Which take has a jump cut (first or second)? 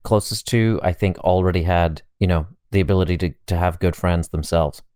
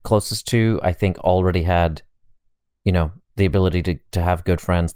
first